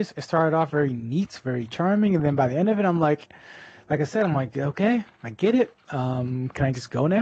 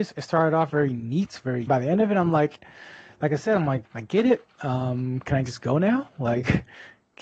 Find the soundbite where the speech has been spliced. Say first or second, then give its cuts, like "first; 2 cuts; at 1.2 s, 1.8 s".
second; 2 cuts; at 1.7 s, 3.8 s